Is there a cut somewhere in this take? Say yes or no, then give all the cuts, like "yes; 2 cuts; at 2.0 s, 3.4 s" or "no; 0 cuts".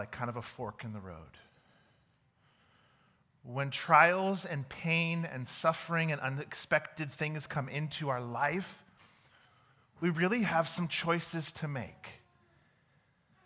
no; 0 cuts